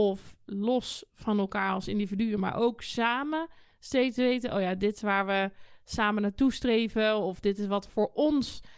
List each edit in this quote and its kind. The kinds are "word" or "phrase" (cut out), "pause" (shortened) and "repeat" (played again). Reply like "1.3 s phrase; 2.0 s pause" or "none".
none